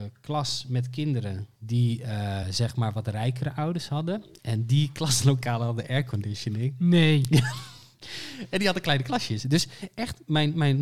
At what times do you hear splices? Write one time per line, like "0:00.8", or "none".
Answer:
0:01.6
0:02.4